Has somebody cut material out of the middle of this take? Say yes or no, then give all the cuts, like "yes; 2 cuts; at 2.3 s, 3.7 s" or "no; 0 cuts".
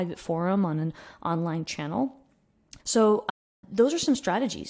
yes; 1 cut; at 2.8 s